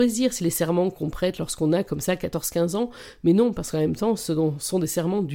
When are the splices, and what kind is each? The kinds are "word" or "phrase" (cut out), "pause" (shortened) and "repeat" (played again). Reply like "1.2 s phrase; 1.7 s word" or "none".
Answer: none